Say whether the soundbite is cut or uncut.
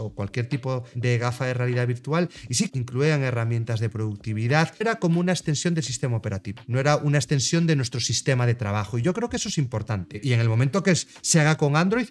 cut